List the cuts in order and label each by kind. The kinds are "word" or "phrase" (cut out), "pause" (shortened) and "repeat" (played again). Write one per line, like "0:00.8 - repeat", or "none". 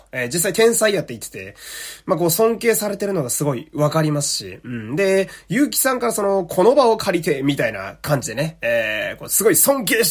none